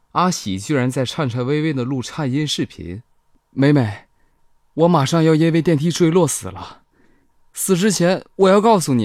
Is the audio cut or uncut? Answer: uncut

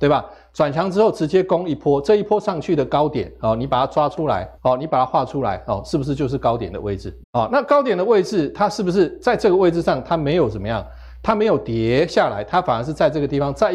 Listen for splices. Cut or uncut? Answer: cut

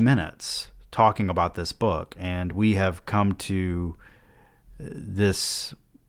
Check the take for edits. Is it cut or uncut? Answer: uncut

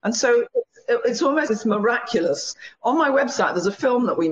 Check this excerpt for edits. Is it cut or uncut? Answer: cut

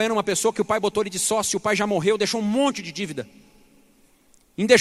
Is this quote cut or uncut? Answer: uncut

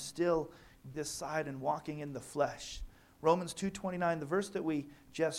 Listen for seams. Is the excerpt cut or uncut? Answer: cut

